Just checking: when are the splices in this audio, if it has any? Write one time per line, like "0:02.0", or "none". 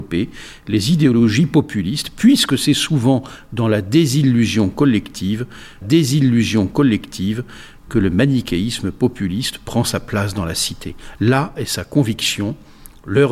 0:05.8